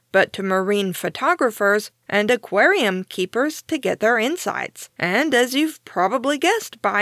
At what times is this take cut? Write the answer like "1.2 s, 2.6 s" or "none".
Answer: 4.9 s